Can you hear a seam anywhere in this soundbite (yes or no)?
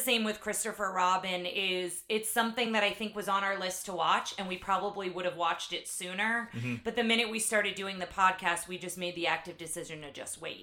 no